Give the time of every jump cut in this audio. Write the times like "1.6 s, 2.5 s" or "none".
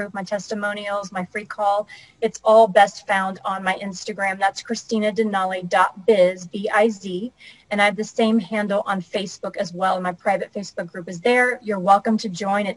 none